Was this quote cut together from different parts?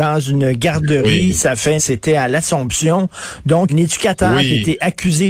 yes; 2 cuts; at 1.8 s, 3.7 s

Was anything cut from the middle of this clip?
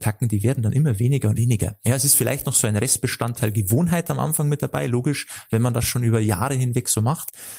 yes; 1 cut; at 1.4 s

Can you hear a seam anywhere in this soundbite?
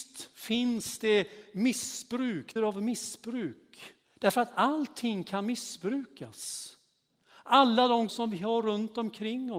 yes; 3 cuts; at 2.6 s, 4.0 s, 8.1 s

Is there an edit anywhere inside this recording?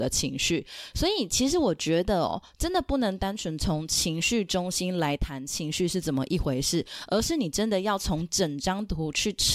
no; 0 cuts

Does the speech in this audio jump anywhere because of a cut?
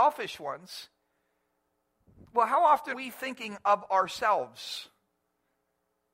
yes; 1 cut; at 2.9 s

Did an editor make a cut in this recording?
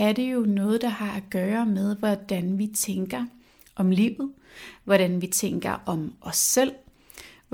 no; 0 cuts

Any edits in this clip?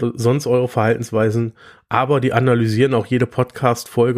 no; 0 cuts

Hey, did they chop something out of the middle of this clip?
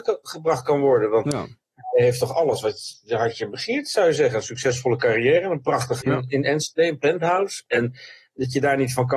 yes; 1 cut; at 6.0 s

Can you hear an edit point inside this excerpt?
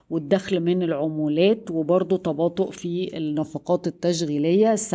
no; 0 cuts

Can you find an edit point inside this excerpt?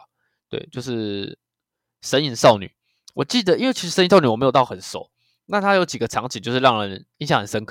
no; 0 cuts

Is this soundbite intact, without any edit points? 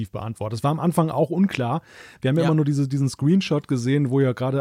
yes; 0 cuts

